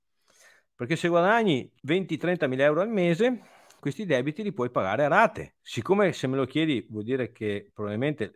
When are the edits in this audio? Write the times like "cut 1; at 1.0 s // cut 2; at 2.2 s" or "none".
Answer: cut 1; at 1.8 s // cut 2; at 5.6 s